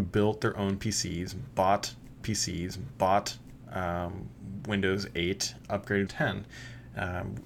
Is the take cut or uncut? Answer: cut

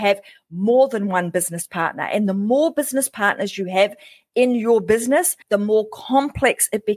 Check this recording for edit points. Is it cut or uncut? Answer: cut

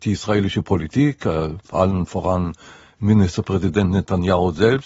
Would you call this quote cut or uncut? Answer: cut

